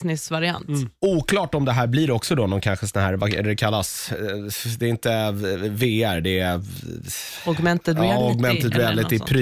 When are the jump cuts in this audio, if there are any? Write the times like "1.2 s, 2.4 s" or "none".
none